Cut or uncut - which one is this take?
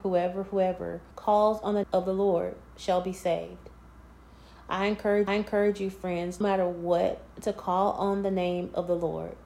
cut